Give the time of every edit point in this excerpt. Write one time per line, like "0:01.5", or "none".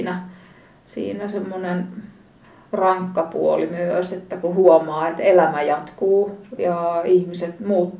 none